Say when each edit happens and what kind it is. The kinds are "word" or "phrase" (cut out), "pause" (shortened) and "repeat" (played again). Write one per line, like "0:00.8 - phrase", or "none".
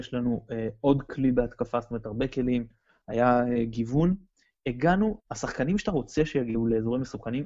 none